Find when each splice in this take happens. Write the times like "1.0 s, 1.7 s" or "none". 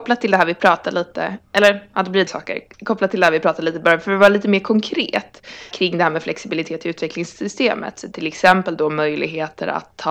2.3 s, 5.7 s

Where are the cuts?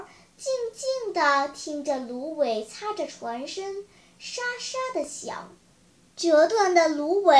5.7 s

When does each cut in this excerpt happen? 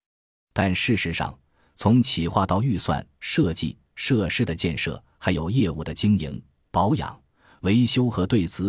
none

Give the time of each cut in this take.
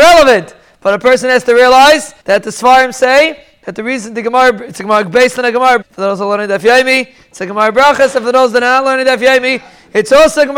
2.2 s, 5.8 s

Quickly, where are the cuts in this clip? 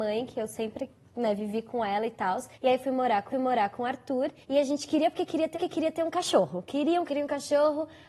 2.5 s, 3.3 s, 4.4 s, 5.5 s, 7.1 s

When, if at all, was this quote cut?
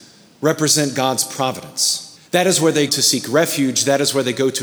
2.2 s, 2.9 s

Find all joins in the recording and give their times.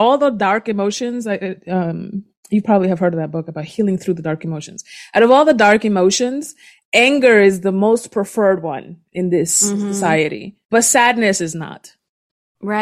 10.6 s

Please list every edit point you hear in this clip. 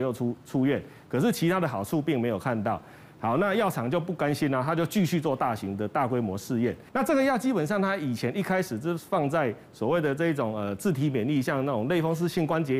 6.9 s

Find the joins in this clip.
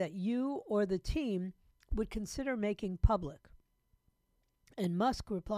none

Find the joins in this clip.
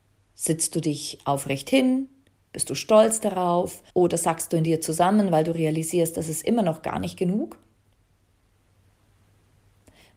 3.9 s

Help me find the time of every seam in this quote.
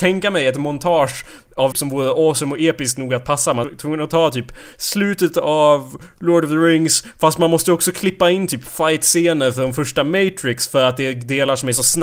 1.7 s, 3.6 s

